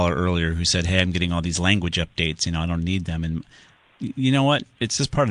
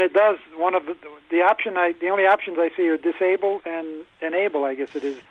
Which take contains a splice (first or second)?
second